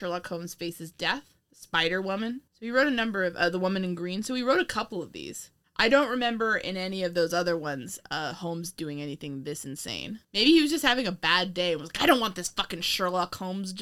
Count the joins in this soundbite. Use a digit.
4